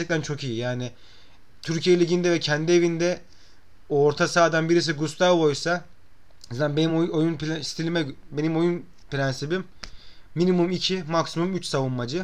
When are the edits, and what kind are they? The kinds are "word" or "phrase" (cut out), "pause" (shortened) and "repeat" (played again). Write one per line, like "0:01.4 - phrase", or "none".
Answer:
none

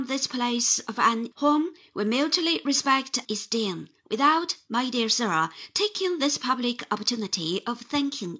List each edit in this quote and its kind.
0:01.3 - word
0:03.2 - word

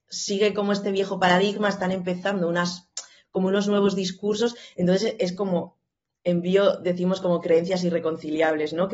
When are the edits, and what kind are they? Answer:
none

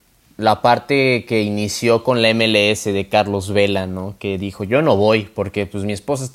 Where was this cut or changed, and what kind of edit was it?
none

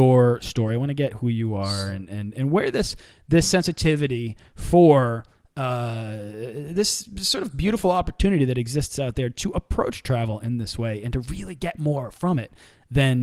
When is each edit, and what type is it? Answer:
none

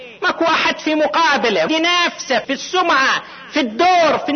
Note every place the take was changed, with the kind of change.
0:01.7 - phrase
0:02.4 - word

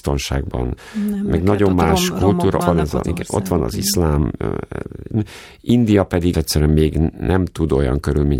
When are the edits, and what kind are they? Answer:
0:02.6 - word
0:03.0 - word
0:06.3 - word

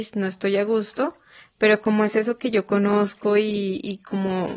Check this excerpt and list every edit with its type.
none

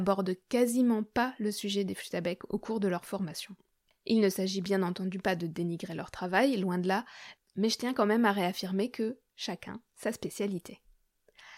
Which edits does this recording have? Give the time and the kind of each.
none

